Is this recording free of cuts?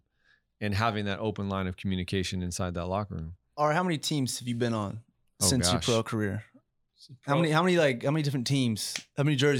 yes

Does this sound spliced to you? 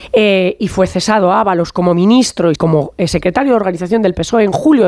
yes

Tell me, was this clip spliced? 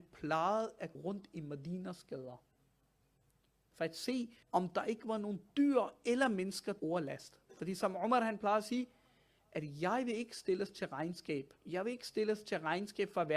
yes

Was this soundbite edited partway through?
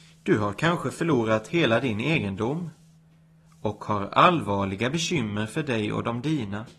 no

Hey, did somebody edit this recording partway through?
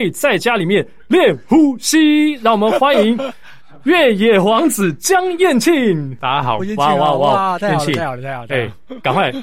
yes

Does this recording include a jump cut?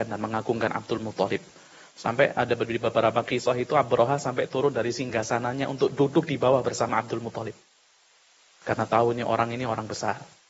no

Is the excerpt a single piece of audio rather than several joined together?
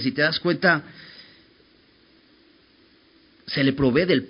yes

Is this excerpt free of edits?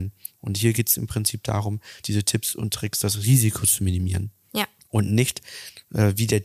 no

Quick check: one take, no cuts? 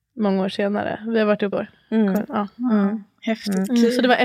no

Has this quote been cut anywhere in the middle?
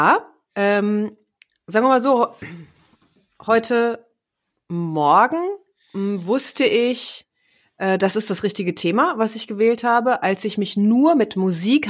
no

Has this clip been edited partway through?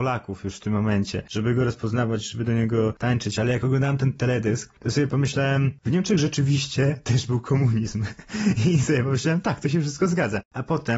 no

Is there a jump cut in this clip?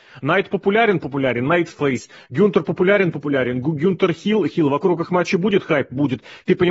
yes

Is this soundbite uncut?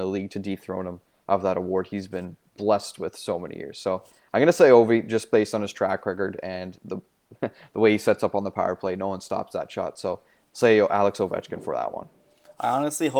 yes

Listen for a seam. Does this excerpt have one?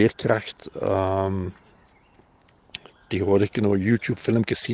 no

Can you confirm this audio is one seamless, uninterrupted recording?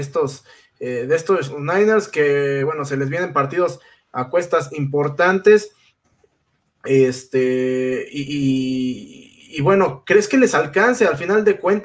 yes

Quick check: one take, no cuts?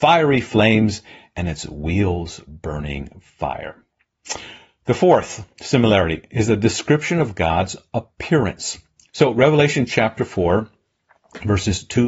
yes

